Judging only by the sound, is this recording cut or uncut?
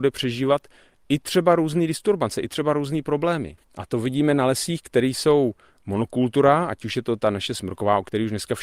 cut